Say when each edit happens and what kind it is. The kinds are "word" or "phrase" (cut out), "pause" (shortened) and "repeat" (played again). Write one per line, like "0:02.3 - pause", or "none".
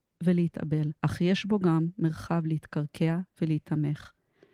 0:01.0 - pause